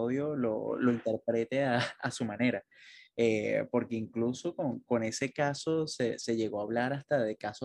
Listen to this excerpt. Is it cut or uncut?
uncut